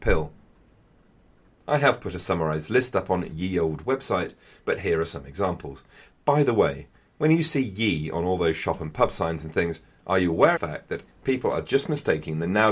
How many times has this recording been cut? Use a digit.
2